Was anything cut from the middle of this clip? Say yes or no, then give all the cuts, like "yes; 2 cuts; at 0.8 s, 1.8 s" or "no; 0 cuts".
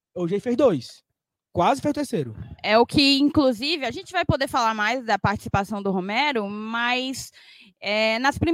no; 0 cuts